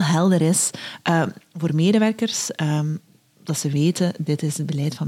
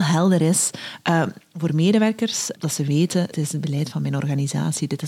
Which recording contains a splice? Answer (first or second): second